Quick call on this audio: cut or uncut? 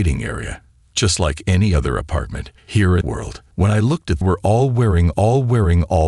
cut